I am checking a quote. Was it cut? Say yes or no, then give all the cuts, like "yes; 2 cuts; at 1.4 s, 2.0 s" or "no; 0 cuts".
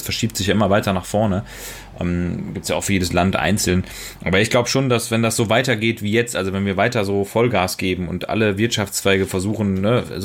no; 0 cuts